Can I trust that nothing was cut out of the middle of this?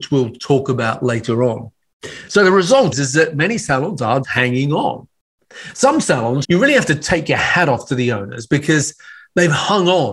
no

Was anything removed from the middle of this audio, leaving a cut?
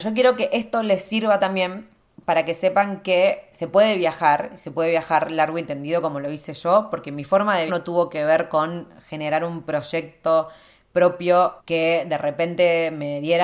yes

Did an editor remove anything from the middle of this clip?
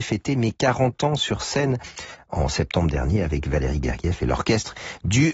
no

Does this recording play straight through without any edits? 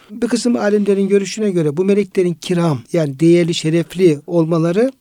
no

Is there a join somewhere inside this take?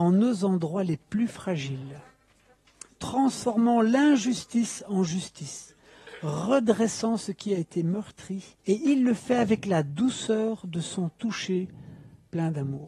yes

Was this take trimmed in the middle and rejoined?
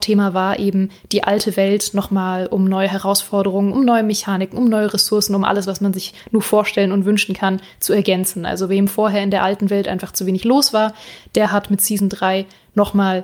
no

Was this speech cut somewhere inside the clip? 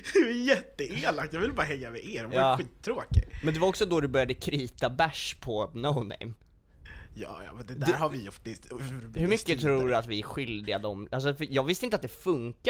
no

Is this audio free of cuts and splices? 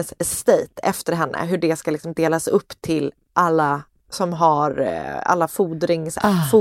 no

